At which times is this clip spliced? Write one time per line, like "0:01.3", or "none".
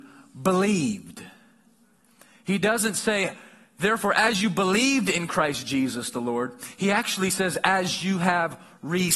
none